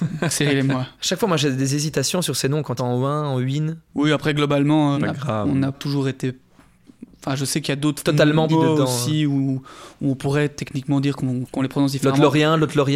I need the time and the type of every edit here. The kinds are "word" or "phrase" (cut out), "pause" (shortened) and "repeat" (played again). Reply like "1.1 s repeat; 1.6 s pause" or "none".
2.8 s phrase; 3.9 s pause; 4.9 s word; 5.7 s word; 8.5 s word; 11.4 s word